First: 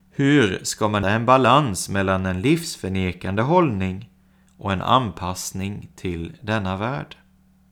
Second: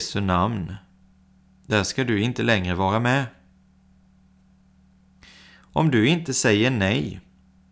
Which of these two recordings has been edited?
first; 1 cut; at 1.0 s

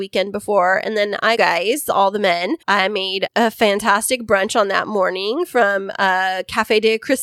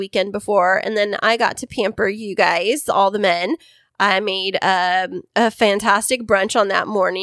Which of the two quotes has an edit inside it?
first; 3 cuts; at 1.4 s, 2.6 s, 3.3 s

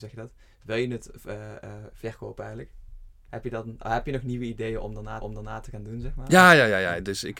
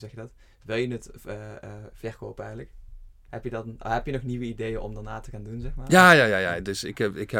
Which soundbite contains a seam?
first; 1 cut; at 5.2 s

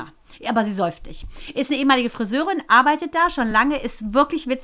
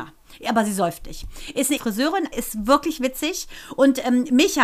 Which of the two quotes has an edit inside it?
second; 2 cuts; at 1.8 s, 2.3 s

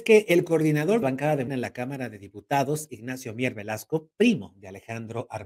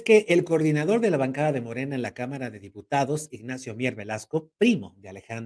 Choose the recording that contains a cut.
first; 2 cuts; at 1.0 s, 1.5 s

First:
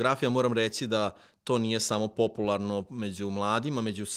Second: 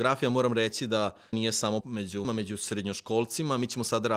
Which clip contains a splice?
second; 3 cuts; at 1.3 s, 1.8 s, 2.2 s

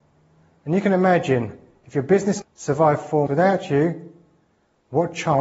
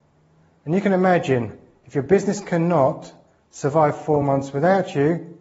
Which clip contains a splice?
first; 2 cuts; at 2.4 s, 3.3 s

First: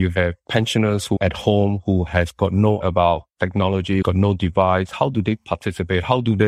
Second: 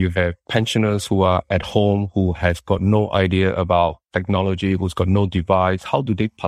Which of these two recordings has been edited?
first; 3 cuts; at 1.2 s, 2.8 s, 4.0 s

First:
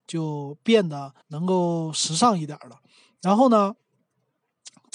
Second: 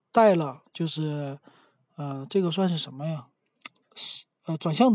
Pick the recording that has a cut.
first; 1 cut; at 1.2 s

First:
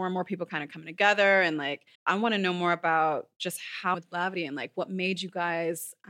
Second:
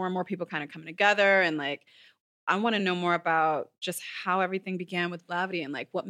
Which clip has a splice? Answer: first; 2 cuts; at 1.9 s, 3.9 s

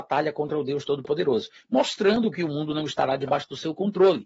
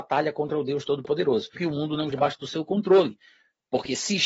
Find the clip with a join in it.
second; 2 cuts; at 1.5 s, 2.1 s

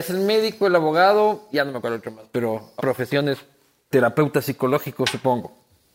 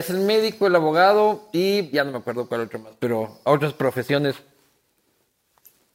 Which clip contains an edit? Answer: first; 4 cuts; at 1.5 s, 1.8 s, 2.8 s, 3.9 s

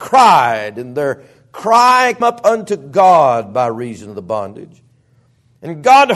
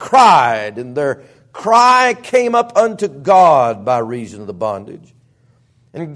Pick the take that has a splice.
first; 1 cut; at 2.2 s

